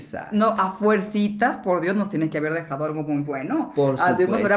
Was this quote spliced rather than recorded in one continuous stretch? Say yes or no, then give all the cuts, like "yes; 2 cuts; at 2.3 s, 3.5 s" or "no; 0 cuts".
no; 0 cuts